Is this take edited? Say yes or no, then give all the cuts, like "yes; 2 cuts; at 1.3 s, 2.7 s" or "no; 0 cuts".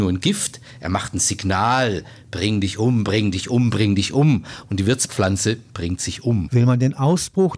no; 0 cuts